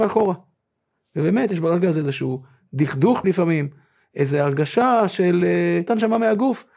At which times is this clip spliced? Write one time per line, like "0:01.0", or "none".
0:03.2
0:05.9